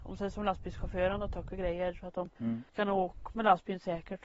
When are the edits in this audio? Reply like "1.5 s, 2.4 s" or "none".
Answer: 2.4 s